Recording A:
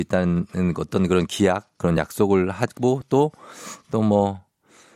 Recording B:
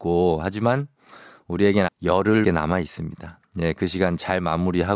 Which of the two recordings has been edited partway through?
B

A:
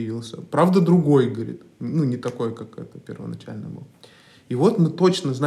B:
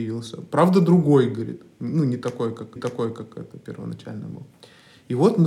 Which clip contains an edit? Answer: B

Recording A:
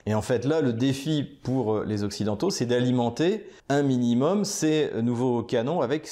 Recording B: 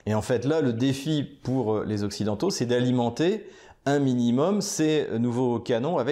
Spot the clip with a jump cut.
A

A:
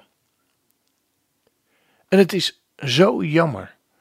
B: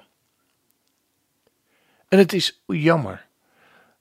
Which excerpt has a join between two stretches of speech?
B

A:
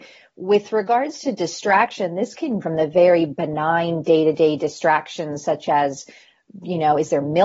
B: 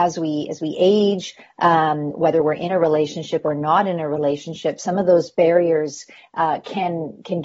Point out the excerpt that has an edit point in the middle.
A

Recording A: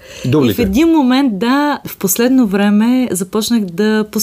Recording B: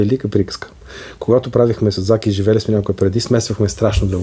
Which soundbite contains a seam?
A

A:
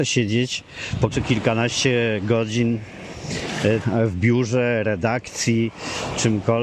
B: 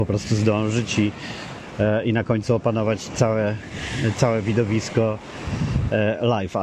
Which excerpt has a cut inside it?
A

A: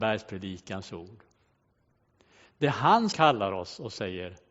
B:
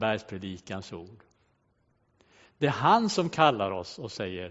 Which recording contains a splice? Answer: A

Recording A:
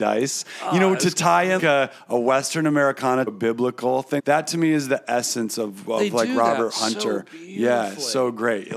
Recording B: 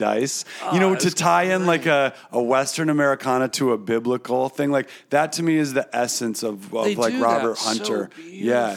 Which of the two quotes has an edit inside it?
A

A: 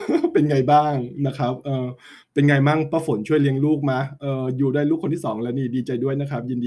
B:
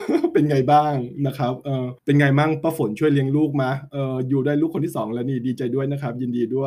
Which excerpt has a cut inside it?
B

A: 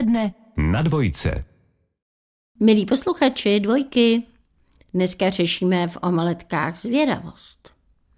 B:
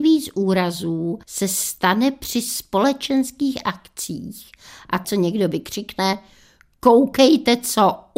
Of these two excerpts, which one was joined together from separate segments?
B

